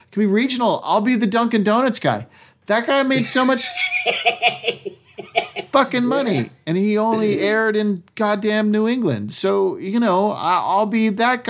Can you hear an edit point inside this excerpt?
no; 0 cuts

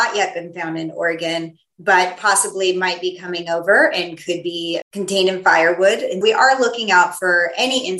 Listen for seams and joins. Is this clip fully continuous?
no; 2 cuts; at 4.8 s, 6.2 s

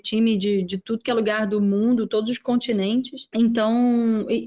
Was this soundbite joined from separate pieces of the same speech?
no; 0 cuts

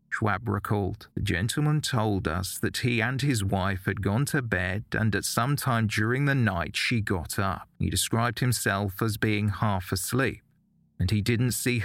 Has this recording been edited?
yes; 2 cuts; at 1.1 s, 7.7 s

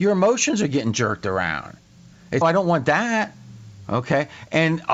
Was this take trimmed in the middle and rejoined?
yes; 1 cut; at 2.4 s

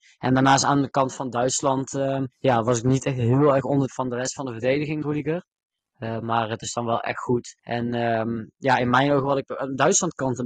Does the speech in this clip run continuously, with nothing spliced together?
no; 5 cuts; at 2.3 s, 3.9 s, 5.0 s, 6.6 s, 7.6 s

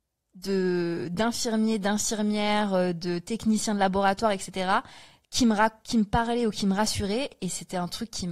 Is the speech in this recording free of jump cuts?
yes; 0 cuts

